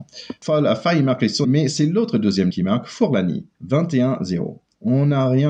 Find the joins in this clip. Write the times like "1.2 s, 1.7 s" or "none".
1.4 s, 2.5 s, 3.5 s